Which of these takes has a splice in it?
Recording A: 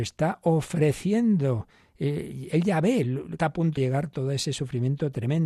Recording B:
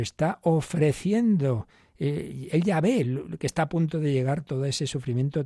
A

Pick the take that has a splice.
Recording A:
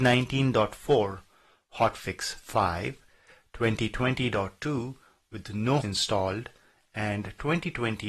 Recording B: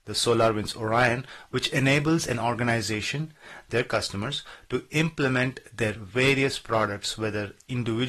A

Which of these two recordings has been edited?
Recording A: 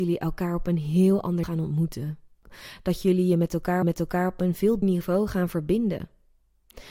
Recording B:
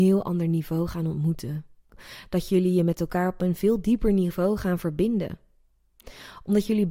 A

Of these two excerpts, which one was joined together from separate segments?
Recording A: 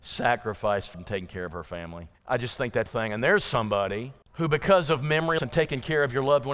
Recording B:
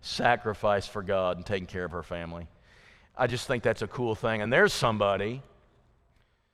A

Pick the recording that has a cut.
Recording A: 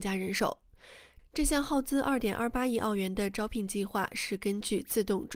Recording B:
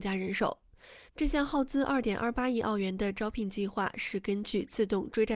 B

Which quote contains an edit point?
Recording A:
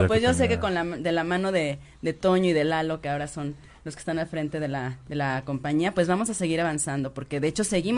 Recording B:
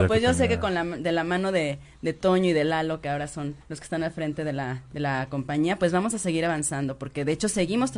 B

